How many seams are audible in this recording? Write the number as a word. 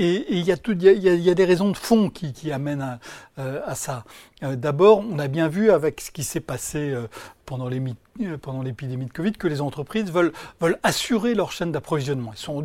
one